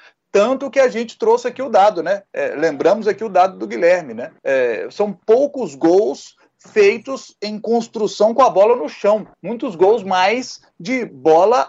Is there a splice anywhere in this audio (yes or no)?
yes